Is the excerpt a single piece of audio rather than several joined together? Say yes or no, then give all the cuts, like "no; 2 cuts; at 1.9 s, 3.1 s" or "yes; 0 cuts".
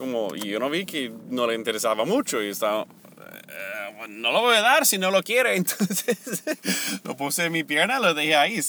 yes; 0 cuts